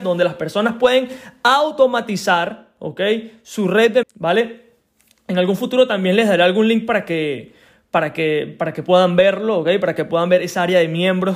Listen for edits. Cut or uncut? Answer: cut